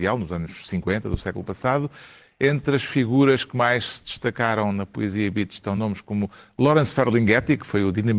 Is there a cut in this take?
no; 0 cuts

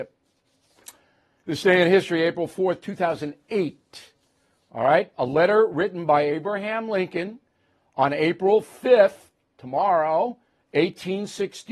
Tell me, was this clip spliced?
no; 0 cuts

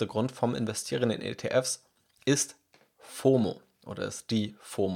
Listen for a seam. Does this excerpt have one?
no; 0 cuts

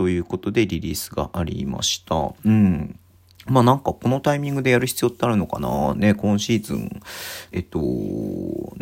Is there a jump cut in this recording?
yes; 1 cut; at 7.5 s

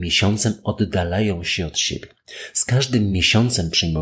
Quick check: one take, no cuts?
yes; 0 cuts

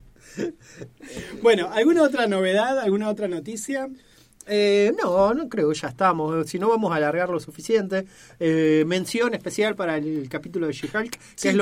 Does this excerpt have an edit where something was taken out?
no; 0 cuts

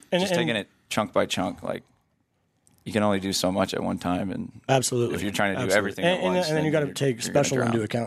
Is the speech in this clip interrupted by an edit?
no; 0 cuts

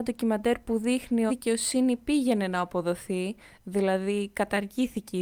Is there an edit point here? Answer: yes; 1 cut; at 1.3 s

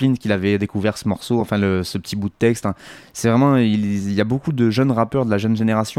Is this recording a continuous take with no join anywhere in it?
yes; 0 cuts

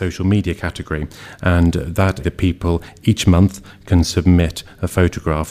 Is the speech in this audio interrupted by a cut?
yes; 1 cut; at 2.2 s

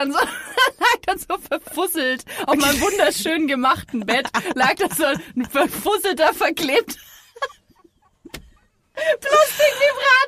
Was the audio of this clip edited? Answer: no; 0 cuts

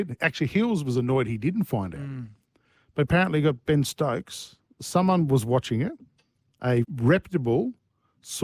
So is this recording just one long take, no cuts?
no; 1 cut; at 6.8 s

